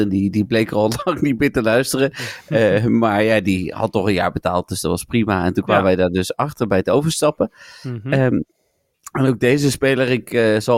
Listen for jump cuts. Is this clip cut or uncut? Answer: uncut